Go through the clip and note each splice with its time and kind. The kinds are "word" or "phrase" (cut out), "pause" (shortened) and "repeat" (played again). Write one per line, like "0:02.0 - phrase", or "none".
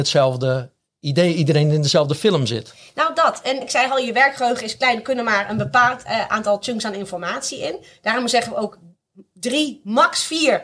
0:03.6 - word